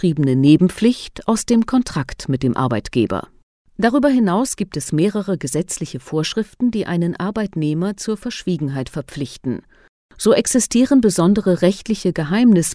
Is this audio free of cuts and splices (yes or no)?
yes